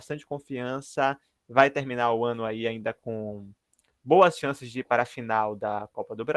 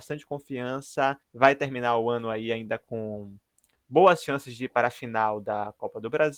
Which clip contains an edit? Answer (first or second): second